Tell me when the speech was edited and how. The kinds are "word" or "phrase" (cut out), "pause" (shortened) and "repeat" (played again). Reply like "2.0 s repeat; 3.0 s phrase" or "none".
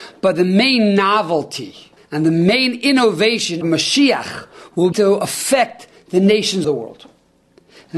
2.0 s pause; 3.6 s word; 4.9 s word; 6.6 s word